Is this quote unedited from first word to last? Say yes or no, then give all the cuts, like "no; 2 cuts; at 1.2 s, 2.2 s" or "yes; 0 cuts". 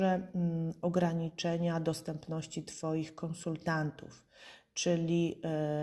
yes; 0 cuts